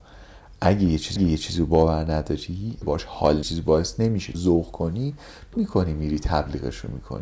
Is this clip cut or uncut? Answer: cut